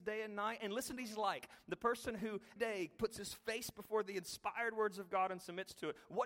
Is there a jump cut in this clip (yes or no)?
yes